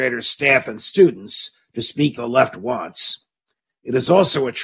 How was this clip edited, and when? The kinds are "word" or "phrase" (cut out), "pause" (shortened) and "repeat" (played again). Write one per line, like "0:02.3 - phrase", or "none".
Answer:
0:02.2 - word